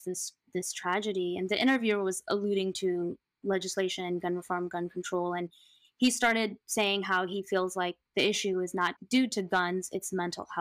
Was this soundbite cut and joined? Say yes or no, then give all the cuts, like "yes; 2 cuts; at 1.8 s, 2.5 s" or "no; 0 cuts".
no; 0 cuts